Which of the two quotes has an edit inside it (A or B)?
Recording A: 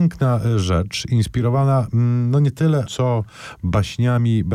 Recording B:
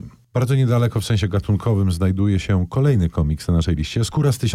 A